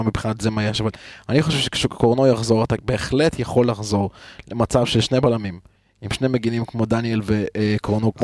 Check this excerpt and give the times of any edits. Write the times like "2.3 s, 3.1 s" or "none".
none